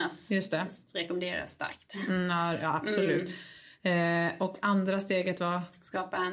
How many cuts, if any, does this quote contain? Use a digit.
0